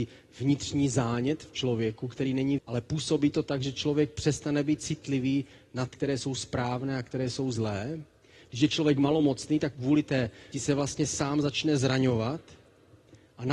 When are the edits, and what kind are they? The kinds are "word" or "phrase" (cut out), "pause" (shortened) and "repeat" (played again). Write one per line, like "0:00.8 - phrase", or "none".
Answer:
0:02.6 - word
0:05.9 - word
0:09.7 - word
0:10.5 - word

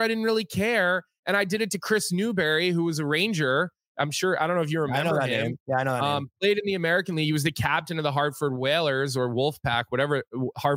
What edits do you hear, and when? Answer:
none

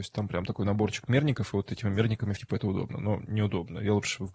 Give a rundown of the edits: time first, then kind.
0:02.4 - word

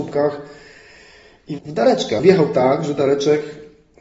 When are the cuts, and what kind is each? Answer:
0:01.6 - word
0:02.2 - word

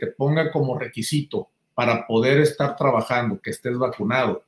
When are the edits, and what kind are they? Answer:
none

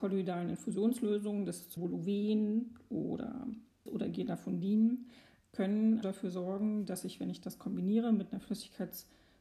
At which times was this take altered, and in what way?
0:01.8 - word
0:03.9 - word
0:05.4 - word
0:06.0 - word

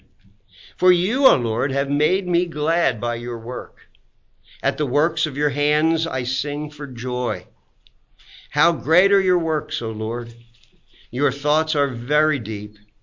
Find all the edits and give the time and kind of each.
none

